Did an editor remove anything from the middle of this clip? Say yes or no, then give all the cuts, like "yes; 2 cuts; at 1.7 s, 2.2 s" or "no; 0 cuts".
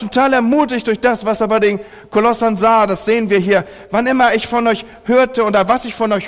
no; 0 cuts